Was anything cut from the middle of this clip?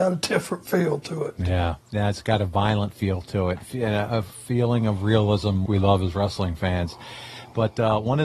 yes; 2 cuts; at 1.8 s, 5.7 s

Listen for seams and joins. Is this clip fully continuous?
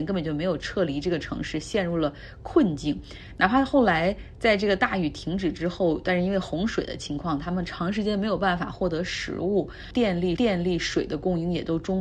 no; 1 cut; at 10.4 s

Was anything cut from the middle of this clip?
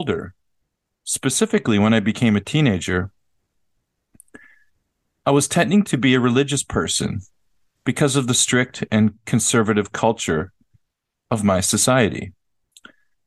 no; 0 cuts

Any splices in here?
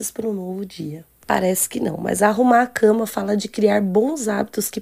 no; 0 cuts

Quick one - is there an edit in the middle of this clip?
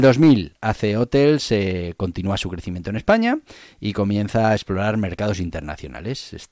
no; 0 cuts

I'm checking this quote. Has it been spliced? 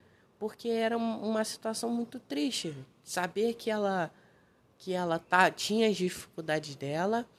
no; 0 cuts

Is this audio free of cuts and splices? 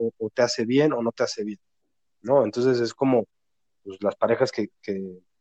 yes; 0 cuts

